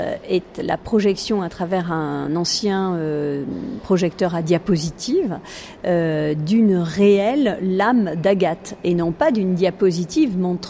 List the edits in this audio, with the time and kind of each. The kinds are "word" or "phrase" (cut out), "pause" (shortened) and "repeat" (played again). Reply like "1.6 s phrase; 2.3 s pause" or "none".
none